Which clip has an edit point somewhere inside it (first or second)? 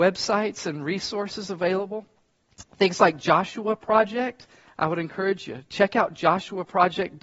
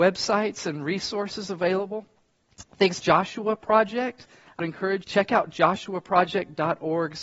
second